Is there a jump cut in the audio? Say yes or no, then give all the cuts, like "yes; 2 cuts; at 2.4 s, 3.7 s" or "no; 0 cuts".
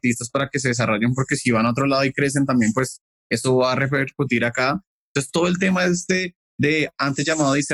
no; 0 cuts